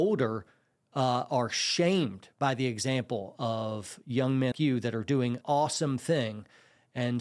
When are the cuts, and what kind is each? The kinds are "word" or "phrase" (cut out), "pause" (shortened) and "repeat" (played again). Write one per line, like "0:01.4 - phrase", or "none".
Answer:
0:04.5 - word
0:05.4 - word